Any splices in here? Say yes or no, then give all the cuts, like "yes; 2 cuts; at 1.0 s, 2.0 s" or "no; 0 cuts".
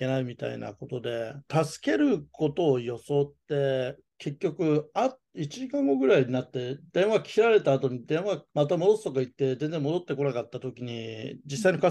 no; 0 cuts